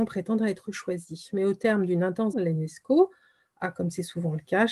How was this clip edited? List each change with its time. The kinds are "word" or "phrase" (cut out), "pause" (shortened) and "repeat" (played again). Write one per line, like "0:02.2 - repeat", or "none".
0:02.3 - word